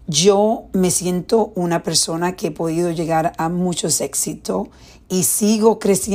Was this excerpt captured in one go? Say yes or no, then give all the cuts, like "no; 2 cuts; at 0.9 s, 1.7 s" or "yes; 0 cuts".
yes; 0 cuts